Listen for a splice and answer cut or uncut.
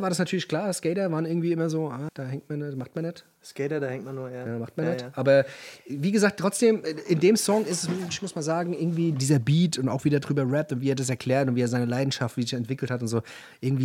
cut